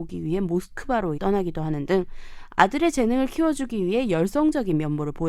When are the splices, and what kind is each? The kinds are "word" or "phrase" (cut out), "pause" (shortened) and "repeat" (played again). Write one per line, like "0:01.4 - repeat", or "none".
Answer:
0:01.2 - word

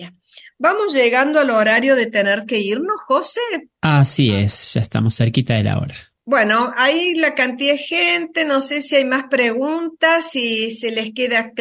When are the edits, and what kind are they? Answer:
0:03.7 - pause
0:06.2 - pause

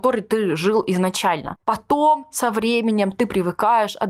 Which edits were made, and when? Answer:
0:01.6 - pause

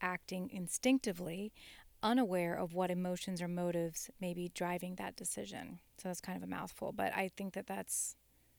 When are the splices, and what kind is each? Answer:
0:05.9 - pause

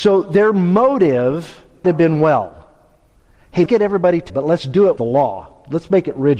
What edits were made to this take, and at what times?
0:01.8 - word
0:03.7 - word
0:04.3 - word
0:05.0 - word

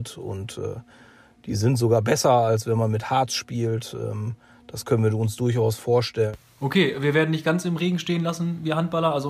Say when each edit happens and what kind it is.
none

